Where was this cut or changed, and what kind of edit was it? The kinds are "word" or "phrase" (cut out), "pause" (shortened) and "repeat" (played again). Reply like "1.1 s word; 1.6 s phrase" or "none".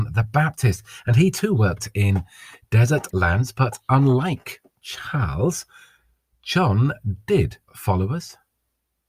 3.1 s word; 7.7 s word